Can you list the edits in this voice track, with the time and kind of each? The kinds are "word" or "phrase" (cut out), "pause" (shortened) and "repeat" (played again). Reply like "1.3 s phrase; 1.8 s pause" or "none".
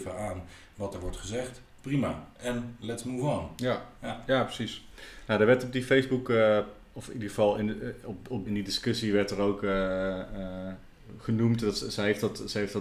8.5 s phrase